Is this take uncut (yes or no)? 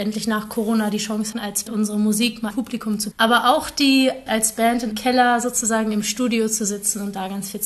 no